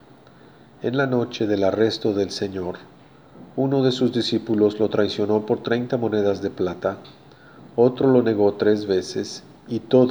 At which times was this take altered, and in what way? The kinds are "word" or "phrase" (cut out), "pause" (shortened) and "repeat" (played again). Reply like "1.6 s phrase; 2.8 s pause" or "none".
none